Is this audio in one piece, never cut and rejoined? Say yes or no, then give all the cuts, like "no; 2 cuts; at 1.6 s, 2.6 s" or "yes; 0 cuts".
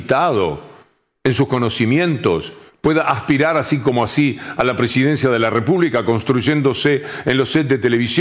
yes; 0 cuts